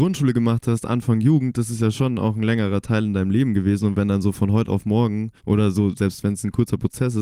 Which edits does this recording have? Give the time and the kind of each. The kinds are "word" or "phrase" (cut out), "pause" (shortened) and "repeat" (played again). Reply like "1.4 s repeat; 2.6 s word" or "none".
5.4 s pause